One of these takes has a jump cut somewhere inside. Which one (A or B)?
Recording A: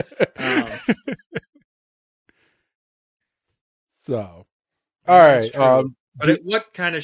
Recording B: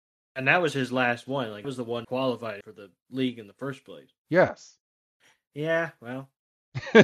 B